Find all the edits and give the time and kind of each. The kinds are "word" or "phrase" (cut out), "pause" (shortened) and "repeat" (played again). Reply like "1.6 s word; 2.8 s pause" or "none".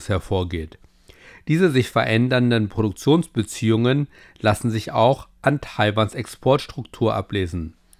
none